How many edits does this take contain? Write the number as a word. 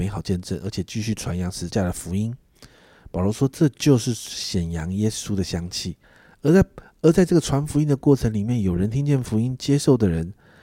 one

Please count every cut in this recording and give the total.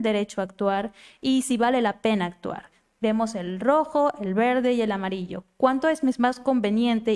zero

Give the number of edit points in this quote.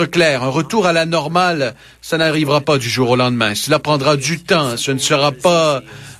zero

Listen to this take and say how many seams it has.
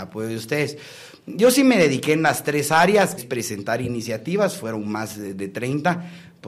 one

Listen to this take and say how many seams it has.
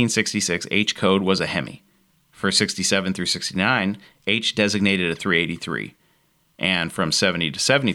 zero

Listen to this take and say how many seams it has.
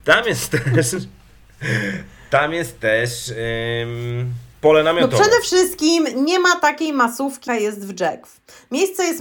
two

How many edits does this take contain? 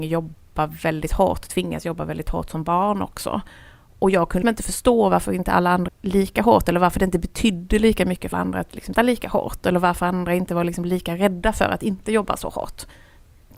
four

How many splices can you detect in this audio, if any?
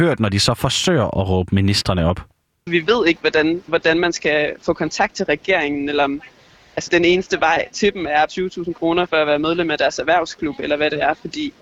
three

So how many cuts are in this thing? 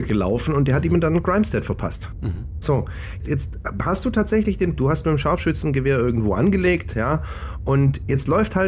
two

